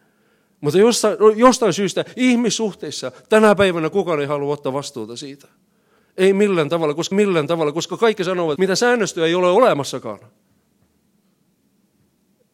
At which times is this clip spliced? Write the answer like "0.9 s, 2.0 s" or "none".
7.1 s, 8.6 s